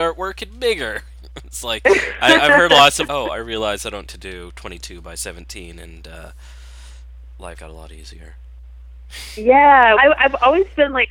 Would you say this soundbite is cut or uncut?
cut